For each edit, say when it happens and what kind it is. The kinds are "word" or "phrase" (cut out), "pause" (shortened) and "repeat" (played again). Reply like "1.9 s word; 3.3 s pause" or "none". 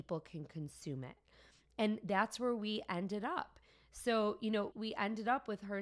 4.7 s word